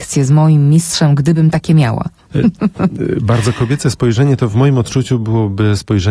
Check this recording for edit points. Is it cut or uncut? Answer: uncut